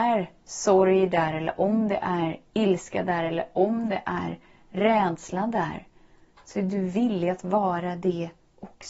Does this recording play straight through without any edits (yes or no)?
yes